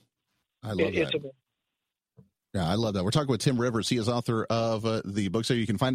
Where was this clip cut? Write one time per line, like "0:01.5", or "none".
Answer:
0:02.4